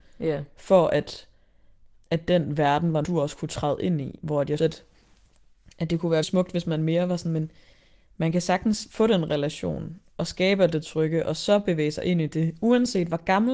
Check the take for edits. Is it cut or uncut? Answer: cut